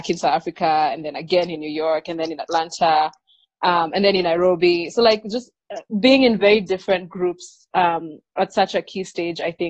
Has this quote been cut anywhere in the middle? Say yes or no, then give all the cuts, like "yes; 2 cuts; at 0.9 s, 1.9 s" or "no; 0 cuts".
no; 0 cuts